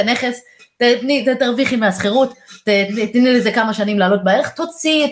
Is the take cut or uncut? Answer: uncut